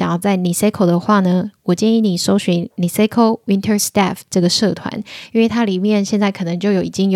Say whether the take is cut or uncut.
uncut